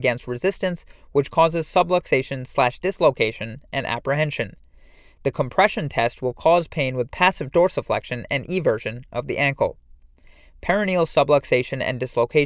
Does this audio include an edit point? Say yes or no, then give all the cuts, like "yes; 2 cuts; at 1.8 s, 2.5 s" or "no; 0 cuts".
no; 0 cuts